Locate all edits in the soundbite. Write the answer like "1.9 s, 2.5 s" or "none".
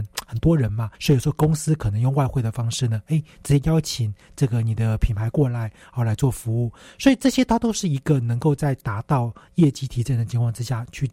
0.9 s